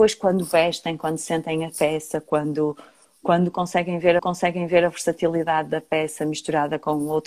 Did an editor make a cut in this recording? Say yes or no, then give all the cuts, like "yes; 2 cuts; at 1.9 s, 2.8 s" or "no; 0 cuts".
yes; 1 cut; at 4.2 s